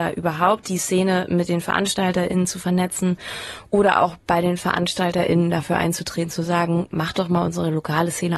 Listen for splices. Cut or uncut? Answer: uncut